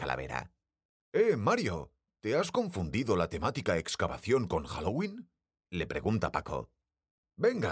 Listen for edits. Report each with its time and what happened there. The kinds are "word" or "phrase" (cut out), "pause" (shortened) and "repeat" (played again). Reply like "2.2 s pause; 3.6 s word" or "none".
none